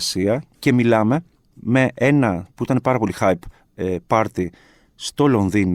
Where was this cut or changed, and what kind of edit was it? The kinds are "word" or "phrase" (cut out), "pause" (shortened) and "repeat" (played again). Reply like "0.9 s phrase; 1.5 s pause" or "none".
none